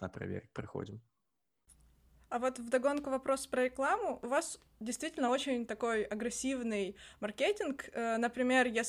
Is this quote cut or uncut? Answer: uncut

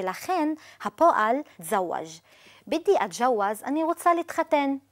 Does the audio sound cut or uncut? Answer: cut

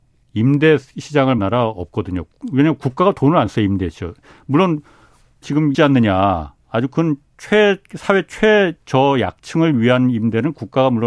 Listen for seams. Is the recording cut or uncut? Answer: cut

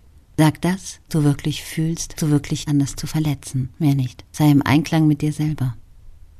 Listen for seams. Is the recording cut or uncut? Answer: cut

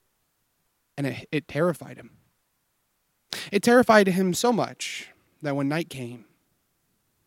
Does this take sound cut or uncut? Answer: uncut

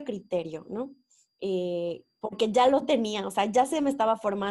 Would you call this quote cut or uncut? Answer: uncut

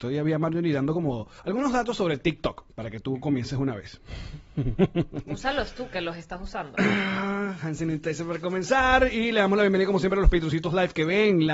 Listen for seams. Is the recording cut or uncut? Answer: cut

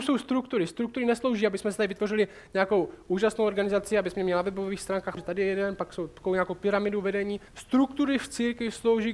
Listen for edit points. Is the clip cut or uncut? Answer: cut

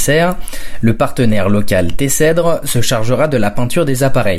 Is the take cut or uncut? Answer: uncut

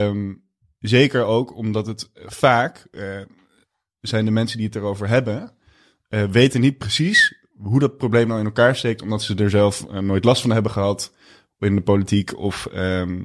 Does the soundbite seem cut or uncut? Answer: uncut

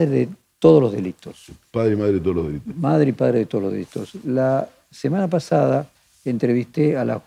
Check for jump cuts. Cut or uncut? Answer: uncut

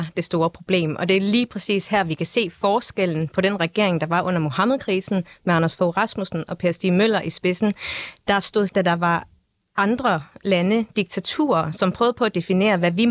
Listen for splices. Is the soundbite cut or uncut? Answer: cut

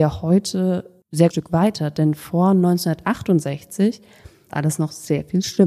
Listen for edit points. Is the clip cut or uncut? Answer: cut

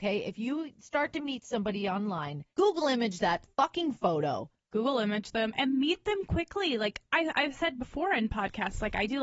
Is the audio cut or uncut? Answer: cut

